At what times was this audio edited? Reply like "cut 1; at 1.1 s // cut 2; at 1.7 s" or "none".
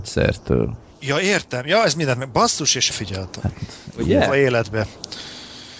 cut 1; at 2.9 s

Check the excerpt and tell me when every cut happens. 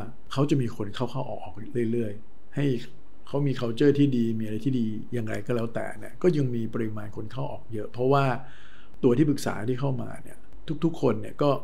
none

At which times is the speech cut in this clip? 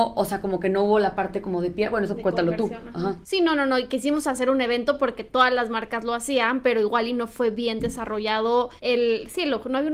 cut 1; at 3.2 s // cut 2; at 8.8 s

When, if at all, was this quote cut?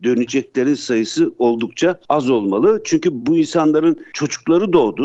none

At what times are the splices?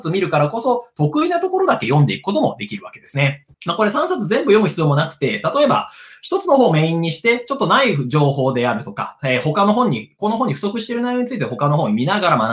cut 1; at 3.5 s

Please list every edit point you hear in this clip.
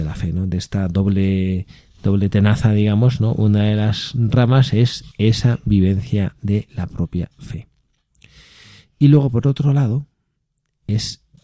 cut 1; at 5.1 s

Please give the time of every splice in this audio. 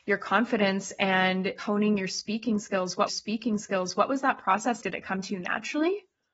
cut 1; at 3.1 s // cut 2; at 4.8 s

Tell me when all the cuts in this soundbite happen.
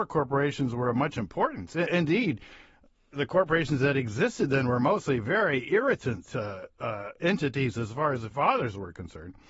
cut 1; at 8.3 s

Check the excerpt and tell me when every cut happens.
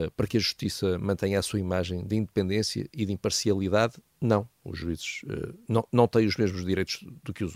none

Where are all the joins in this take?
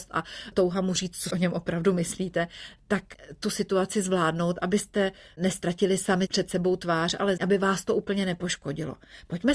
cut 1; at 1.3 s // cut 2; at 7.4 s

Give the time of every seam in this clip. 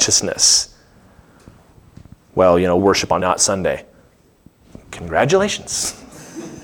cut 1; at 2.8 s // cut 2; at 3.2 s

